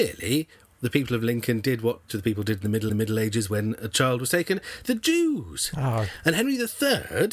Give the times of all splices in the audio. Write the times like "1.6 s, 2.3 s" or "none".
2.1 s, 2.9 s, 4.8 s